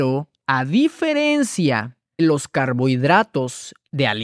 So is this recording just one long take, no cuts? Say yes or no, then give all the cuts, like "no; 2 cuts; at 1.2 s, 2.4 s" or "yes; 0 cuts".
no; 1 cut; at 2.2 s